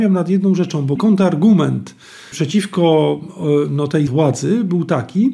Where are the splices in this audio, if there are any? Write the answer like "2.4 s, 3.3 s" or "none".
1.0 s, 2.3 s, 4.1 s